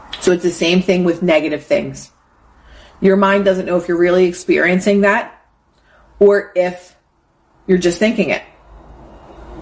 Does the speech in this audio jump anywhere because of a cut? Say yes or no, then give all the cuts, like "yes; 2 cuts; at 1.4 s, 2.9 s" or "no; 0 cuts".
no; 0 cuts